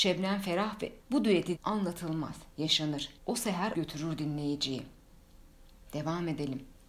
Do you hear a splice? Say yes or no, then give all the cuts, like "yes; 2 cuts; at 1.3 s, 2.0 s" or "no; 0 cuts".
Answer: yes; 4 cuts; at 1.0 s, 1.5 s, 3.2 s, 3.7 s